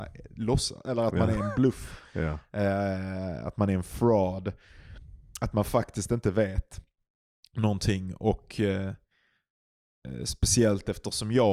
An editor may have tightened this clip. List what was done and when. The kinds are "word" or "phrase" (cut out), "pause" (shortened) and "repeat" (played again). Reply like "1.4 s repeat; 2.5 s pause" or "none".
none